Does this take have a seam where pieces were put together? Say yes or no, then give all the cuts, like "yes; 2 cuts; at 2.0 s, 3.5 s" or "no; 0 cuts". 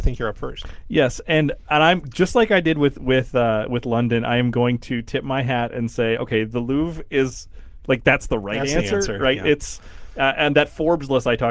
no; 0 cuts